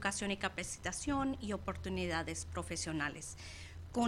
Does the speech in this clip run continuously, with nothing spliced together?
yes; 0 cuts

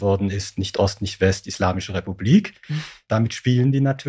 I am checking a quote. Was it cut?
no; 0 cuts

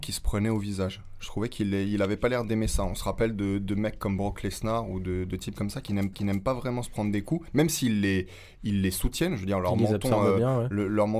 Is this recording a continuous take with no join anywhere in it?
no; 1 cut; at 6.1 s

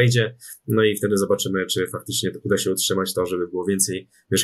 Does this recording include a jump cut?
no; 0 cuts

